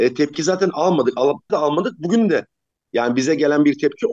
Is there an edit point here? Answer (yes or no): yes